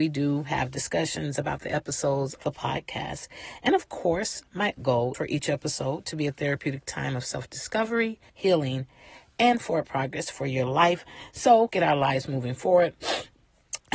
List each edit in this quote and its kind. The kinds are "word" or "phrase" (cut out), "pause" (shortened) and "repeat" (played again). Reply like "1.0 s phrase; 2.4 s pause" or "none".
2.4 s word; 4.8 s word; 5.1 s word; 8.3 s pause; 11.7 s word